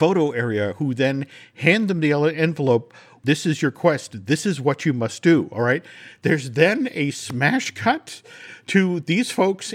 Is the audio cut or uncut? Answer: uncut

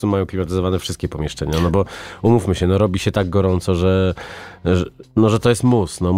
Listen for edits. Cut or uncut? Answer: uncut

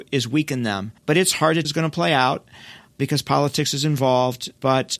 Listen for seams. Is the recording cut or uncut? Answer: cut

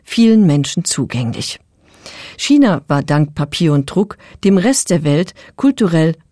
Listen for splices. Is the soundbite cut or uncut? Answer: uncut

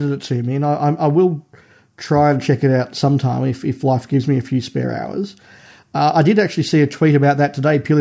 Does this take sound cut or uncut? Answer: uncut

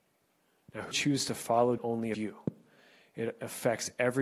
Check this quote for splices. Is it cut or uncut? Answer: cut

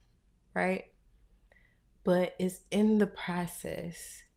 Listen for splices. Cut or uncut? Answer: uncut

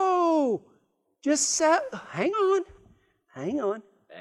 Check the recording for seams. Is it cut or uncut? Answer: uncut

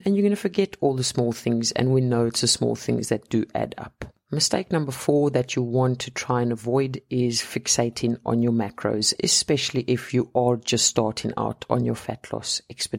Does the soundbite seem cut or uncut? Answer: uncut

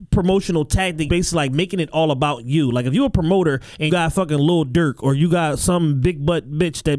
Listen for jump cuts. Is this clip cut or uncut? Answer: cut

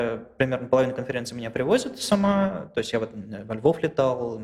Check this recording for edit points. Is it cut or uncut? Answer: uncut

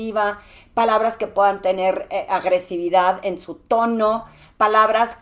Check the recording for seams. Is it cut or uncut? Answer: uncut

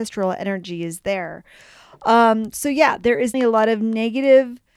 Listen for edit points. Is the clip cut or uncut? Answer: cut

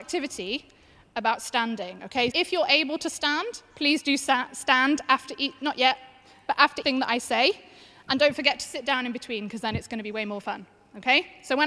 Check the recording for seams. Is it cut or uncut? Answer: cut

